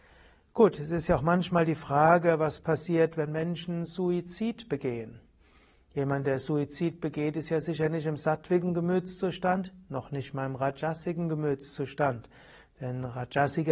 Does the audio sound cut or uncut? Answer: uncut